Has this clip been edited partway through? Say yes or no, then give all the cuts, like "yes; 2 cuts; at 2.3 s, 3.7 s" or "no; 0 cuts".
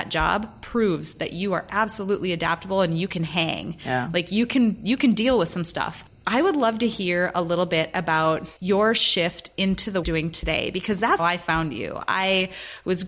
yes; 3 cuts; at 8.6 s, 10.0 s, 11.2 s